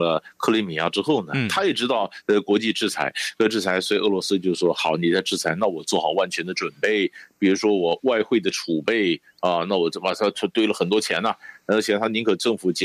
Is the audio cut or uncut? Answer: uncut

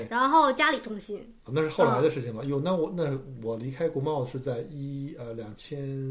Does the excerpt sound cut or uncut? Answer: cut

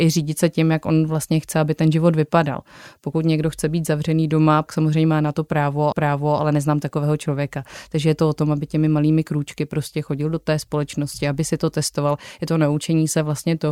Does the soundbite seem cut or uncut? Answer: cut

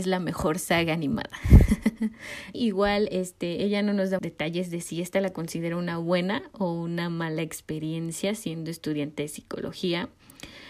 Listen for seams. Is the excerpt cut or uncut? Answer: cut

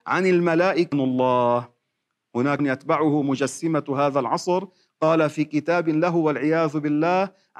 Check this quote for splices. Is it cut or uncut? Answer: cut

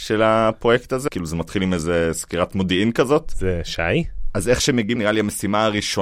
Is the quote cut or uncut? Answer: cut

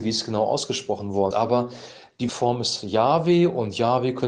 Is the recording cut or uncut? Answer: cut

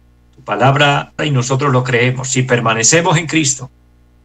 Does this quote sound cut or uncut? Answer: cut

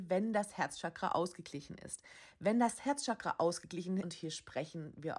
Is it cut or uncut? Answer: cut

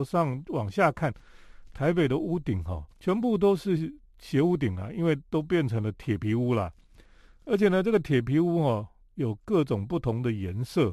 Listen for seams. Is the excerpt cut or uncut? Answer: cut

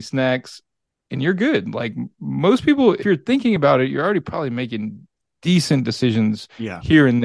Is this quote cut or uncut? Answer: uncut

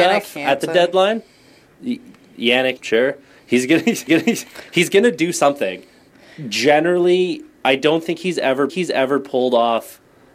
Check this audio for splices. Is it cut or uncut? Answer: cut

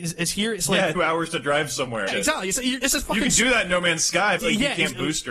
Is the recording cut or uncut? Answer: cut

